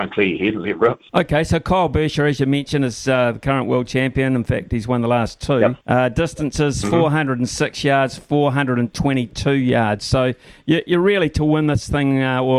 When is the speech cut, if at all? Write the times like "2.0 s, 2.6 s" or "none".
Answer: 1.1 s, 5.8 s